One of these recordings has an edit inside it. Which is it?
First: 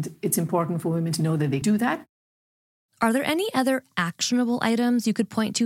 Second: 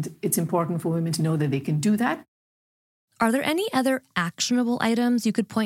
first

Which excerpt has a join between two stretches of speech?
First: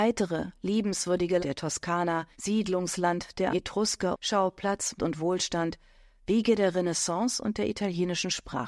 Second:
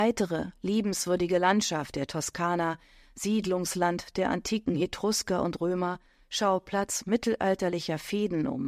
first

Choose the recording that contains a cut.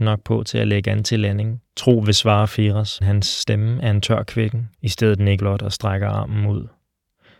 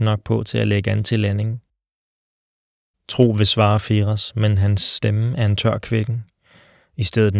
first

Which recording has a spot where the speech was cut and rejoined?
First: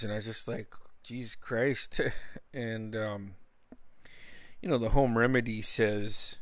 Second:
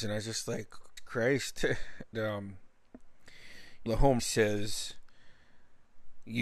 second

